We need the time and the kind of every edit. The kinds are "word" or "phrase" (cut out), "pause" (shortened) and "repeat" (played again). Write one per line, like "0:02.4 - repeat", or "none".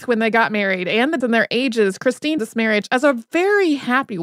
0:01.2 - word
0:02.4 - word